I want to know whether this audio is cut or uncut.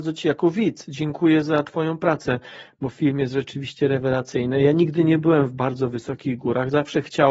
uncut